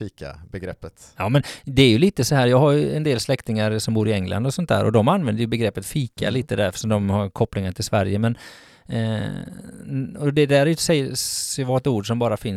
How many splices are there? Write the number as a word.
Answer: zero